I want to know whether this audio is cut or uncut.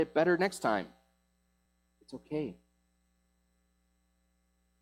cut